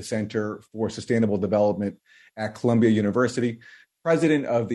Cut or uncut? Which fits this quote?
uncut